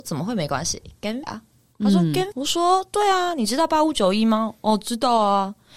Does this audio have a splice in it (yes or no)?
yes